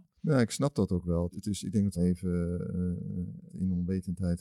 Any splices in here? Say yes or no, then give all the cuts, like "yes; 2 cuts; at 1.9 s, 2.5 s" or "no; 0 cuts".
yes; 3 cuts; at 1.3 s, 1.9 s, 3.5 s